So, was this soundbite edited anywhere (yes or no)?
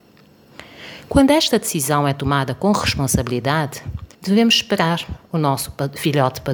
yes